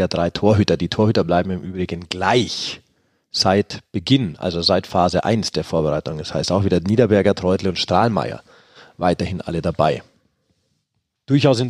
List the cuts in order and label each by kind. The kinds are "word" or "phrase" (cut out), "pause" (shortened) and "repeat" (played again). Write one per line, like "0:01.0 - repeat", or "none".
none